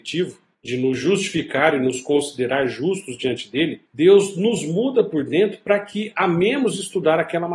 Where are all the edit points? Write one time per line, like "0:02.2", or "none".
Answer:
0:03.9

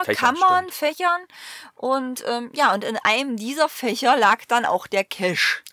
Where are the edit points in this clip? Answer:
none

